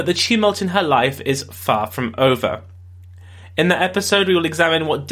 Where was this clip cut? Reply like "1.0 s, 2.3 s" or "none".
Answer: none